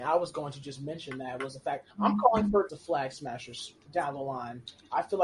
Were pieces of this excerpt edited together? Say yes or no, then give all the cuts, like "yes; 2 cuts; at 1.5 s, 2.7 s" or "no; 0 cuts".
yes; 2 cuts; at 1.9 s, 2.7 s